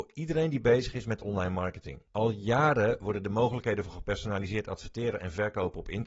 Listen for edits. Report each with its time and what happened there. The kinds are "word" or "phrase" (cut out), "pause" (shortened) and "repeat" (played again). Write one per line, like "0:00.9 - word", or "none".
0:02.1 - pause